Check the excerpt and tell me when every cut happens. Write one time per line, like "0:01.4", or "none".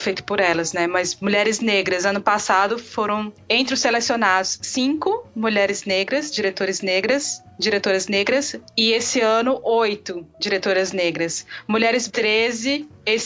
0:12.1

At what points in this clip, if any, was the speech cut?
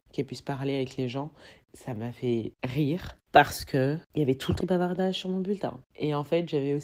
0:04.6

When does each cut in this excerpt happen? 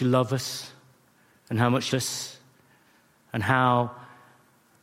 0:01.9

